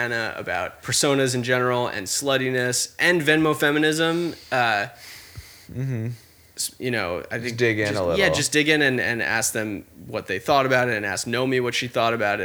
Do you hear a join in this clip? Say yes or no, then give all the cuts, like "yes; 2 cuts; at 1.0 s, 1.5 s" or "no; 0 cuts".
yes; 1 cut; at 4.5 s